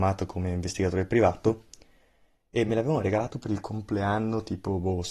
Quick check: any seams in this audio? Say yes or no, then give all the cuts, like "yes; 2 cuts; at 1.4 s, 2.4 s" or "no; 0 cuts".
no; 0 cuts